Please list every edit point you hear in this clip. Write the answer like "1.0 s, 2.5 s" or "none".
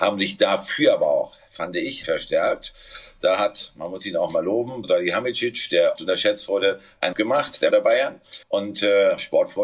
2.0 s, 4.8 s, 6.0 s, 7.1 s, 7.7 s, 8.4 s